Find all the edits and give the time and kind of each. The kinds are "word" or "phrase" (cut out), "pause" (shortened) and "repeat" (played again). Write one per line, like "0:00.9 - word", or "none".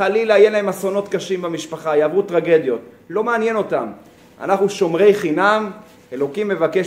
none